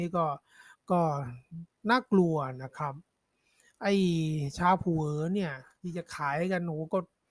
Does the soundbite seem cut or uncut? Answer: uncut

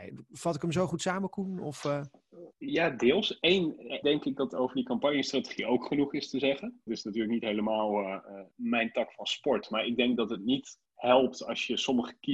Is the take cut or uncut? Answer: cut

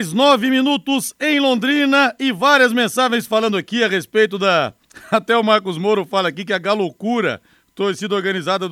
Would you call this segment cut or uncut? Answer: uncut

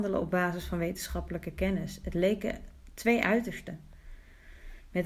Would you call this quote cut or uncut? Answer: uncut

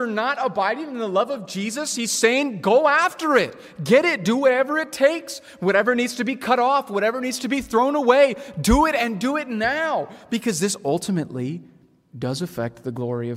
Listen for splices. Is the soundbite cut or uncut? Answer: uncut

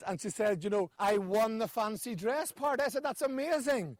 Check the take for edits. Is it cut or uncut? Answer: cut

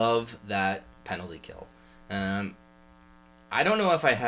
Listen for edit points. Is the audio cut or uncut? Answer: uncut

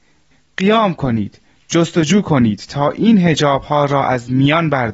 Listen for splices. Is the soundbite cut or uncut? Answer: uncut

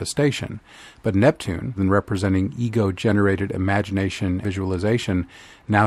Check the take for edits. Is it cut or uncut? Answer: cut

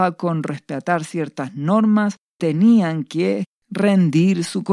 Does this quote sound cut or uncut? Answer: cut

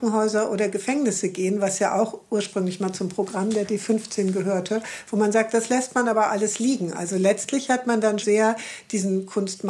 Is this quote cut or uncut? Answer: cut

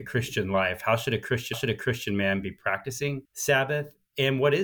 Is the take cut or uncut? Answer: cut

